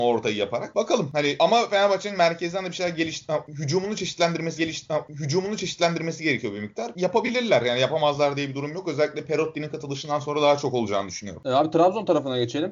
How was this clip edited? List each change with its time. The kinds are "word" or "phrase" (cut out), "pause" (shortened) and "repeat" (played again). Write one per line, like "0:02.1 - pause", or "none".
0:04.6 - repeat